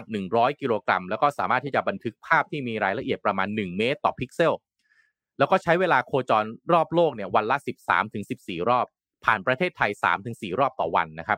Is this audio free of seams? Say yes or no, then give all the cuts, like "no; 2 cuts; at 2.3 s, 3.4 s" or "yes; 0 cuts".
yes; 0 cuts